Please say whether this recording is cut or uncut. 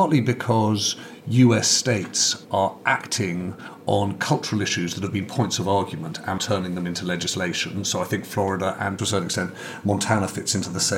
cut